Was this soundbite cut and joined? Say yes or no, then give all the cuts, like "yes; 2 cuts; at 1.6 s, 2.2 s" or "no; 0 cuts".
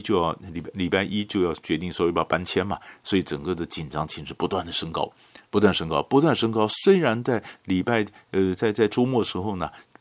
yes; 1 cut; at 5.5 s